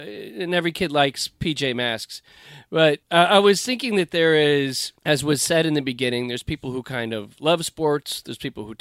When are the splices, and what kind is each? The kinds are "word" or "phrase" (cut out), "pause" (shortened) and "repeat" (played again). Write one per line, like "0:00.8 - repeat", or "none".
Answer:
0:03.0 - pause
0:05.0 - pause